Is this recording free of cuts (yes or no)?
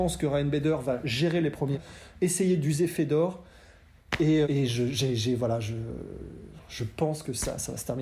no